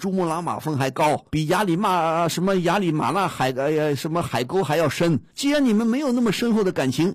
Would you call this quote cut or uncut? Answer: cut